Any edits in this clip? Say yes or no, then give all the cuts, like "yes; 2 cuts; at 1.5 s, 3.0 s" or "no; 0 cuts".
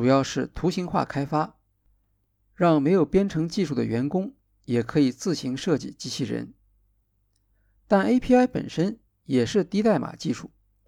no; 0 cuts